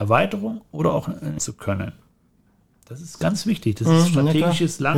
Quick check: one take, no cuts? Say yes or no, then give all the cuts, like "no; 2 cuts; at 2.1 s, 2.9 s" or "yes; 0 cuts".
no; 1 cut; at 1.4 s